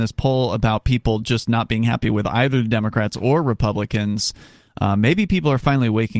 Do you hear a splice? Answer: no; 0 cuts

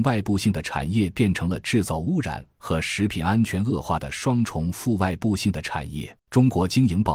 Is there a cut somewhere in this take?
yes; 1 cut; at 6.2 s

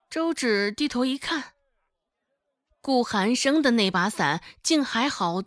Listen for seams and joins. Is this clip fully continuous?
yes; 0 cuts

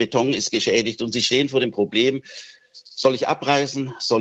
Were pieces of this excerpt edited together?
no; 0 cuts

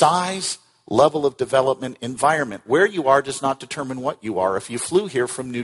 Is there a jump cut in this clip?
no; 0 cuts

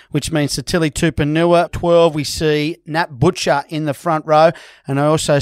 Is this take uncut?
no; 1 cut; at 1.7 s

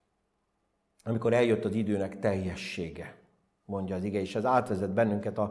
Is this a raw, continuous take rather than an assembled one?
yes; 0 cuts

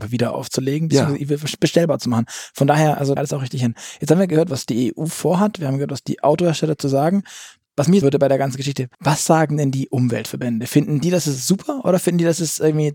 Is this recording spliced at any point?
yes; 3 cuts; at 3.2 s, 8.0 s, 8.9 s

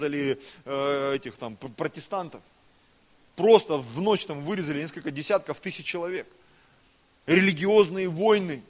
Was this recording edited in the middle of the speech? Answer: no; 0 cuts

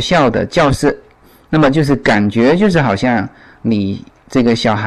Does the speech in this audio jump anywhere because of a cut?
no; 0 cuts

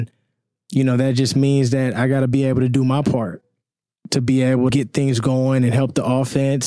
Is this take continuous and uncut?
no; 1 cut; at 4.7 s

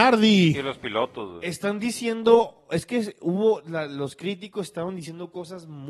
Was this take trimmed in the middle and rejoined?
no; 0 cuts

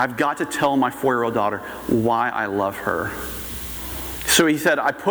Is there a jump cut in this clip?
no; 0 cuts

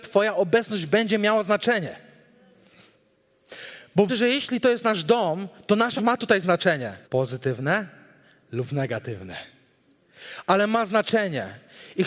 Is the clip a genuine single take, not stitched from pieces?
no; 3 cuts; at 4.1 s, 6.0 s, 7.0 s

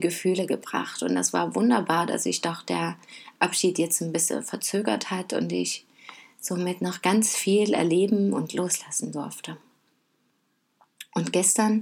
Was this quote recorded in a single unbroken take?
yes; 0 cuts

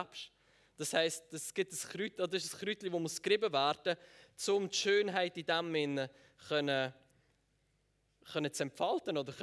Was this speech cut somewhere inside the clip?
no; 0 cuts

